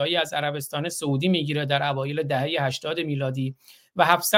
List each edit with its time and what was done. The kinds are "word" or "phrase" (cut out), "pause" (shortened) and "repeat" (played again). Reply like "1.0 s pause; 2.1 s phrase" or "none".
none